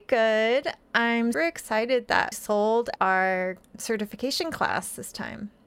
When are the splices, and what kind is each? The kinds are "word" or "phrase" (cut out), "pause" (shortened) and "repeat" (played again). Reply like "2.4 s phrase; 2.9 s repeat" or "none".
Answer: 1.3 s word; 2.3 s word; 3.0 s word